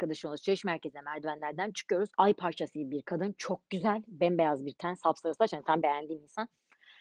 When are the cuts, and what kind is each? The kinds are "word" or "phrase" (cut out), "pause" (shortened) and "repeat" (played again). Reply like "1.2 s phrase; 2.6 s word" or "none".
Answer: 2.1 s pause; 5.8 s word

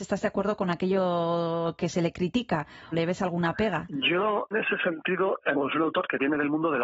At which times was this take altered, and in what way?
2.9 s word; 4.5 s word; 5.5 s word

